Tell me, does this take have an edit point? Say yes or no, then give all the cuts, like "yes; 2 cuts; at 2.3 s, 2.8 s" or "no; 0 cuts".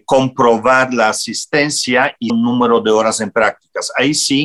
yes; 1 cut; at 2.3 s